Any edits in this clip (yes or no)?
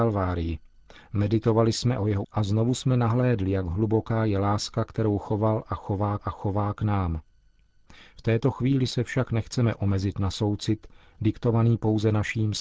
yes